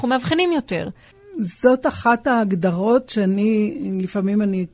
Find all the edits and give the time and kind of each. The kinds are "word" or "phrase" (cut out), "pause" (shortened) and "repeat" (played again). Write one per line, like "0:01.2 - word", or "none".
none